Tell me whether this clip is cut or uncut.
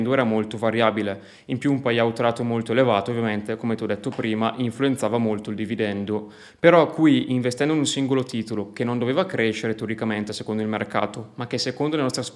uncut